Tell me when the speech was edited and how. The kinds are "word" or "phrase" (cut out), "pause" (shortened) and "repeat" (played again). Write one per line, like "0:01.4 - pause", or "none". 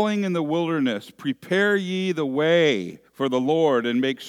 0:03.1 - pause